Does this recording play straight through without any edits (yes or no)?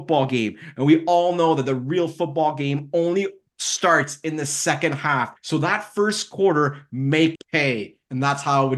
no